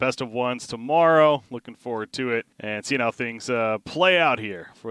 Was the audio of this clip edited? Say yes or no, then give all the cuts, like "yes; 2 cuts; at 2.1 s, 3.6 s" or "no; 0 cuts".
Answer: yes; 1 cut; at 2.5 s